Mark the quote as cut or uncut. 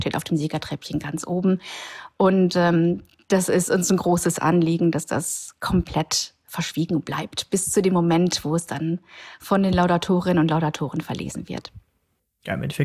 uncut